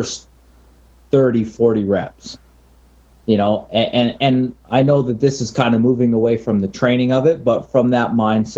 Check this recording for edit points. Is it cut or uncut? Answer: uncut